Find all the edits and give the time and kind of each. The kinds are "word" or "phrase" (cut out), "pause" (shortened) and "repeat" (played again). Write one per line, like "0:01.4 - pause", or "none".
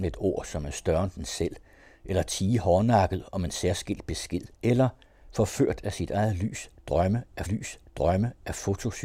0:04.5 - pause
0:07.5 - repeat